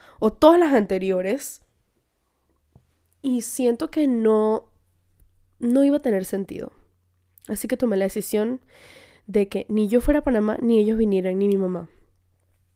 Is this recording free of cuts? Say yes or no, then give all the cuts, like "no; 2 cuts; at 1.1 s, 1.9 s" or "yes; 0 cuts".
yes; 0 cuts